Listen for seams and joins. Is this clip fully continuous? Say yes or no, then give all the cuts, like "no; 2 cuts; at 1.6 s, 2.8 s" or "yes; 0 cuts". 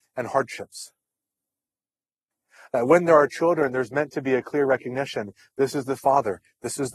yes; 0 cuts